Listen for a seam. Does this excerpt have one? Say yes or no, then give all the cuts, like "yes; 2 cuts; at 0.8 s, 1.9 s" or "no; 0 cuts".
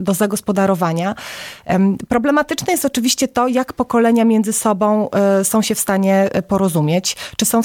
no; 0 cuts